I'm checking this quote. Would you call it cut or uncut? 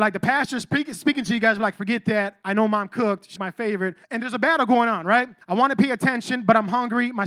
cut